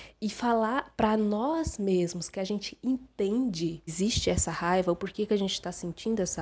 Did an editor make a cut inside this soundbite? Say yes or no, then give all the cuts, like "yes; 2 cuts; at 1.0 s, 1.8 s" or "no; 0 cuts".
yes; 2 cuts; at 0.9 s, 3.9 s